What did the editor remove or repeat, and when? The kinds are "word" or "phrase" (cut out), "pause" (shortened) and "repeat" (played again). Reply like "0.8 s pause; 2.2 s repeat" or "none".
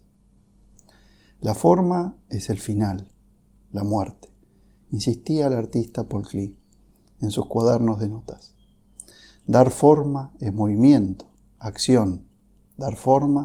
none